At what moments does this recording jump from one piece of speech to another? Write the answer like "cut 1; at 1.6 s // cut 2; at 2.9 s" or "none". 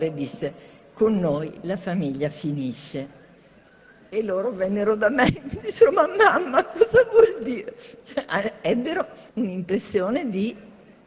cut 1; at 9.3 s